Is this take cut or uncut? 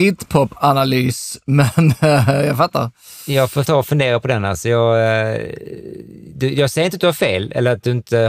cut